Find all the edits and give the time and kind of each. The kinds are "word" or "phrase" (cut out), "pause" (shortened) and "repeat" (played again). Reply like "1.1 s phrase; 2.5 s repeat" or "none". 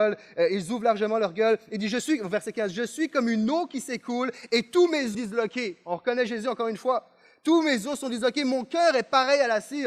5.1 s phrase

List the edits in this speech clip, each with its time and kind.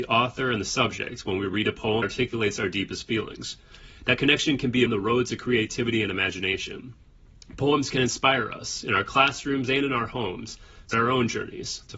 2.0 s word; 4.9 s phrase; 10.9 s word

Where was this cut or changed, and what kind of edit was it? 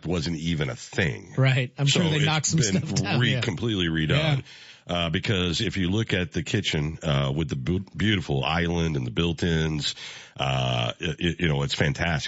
none

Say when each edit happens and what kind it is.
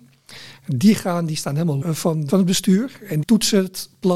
1.8 s word; 2.3 s word; 3.2 s word

